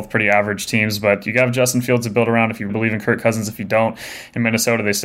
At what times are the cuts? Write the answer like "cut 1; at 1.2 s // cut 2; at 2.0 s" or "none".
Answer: cut 1; at 2.7 s